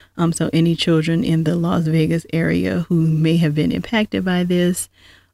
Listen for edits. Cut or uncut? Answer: uncut